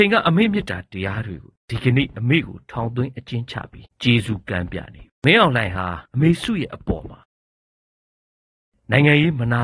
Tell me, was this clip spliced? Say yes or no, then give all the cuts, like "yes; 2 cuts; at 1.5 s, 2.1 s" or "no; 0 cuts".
yes; 4 cuts; at 1.6 s, 3.9 s, 5.1 s, 6.1 s